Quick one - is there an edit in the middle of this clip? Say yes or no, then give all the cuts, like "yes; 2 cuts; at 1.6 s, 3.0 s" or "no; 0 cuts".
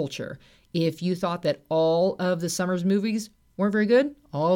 no; 0 cuts